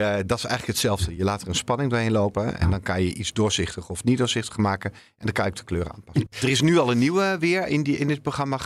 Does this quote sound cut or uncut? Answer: uncut